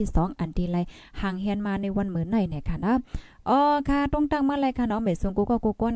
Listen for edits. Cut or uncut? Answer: uncut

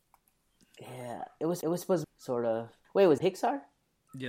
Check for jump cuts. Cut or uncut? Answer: cut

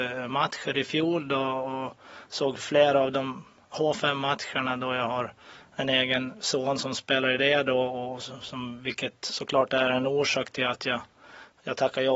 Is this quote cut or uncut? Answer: uncut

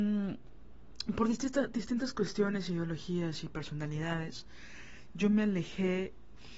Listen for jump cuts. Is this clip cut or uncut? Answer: uncut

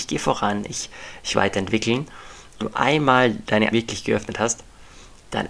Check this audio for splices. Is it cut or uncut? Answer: cut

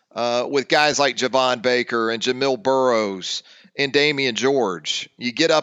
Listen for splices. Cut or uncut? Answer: uncut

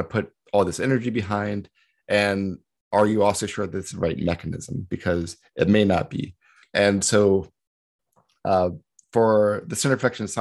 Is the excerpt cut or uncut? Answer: cut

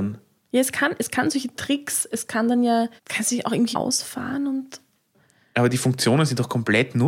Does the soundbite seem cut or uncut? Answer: cut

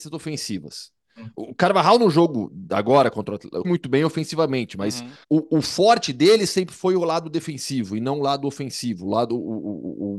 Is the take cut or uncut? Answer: cut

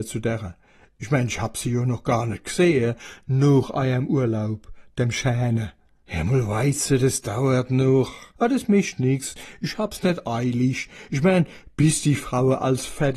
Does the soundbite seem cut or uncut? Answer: uncut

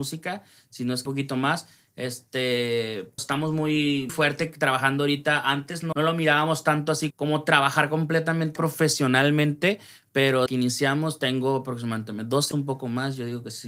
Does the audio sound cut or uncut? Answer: cut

